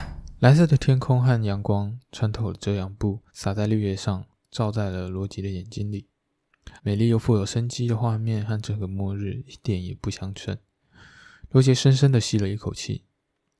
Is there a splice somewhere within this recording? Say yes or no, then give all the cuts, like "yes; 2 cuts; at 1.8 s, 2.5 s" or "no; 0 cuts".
yes; 2 cuts; at 3.3 s, 6.8 s